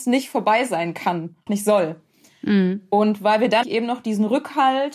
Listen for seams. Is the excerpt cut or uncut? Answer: cut